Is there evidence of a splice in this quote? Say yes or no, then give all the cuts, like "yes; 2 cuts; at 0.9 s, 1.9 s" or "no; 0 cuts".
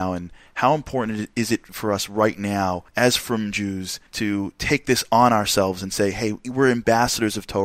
yes; 2 cuts; at 2.9 s, 4.1 s